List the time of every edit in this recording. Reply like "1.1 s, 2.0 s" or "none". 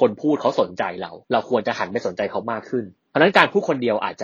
1.2 s, 3.0 s